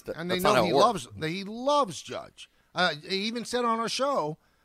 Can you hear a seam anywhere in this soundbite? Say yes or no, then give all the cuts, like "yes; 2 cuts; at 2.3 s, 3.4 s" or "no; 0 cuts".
no; 0 cuts